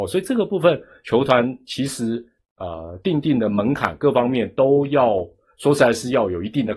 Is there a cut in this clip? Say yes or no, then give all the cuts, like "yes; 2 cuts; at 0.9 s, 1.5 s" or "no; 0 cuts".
no; 0 cuts